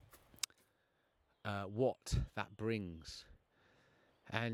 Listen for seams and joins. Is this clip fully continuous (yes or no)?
yes